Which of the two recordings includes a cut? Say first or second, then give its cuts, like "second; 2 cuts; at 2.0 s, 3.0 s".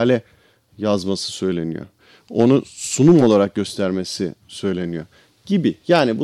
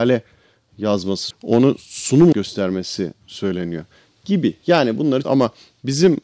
second; 3 cuts; at 1.3 s, 2.3 s, 5.2 s